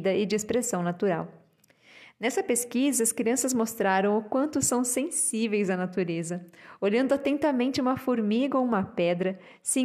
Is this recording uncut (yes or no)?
yes